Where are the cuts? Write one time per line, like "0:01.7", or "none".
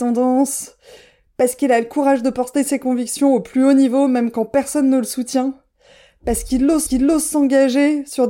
0:06.9